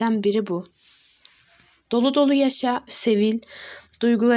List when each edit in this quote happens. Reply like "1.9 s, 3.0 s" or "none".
2.9 s